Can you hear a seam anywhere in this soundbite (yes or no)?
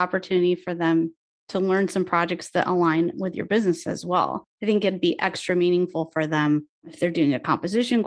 no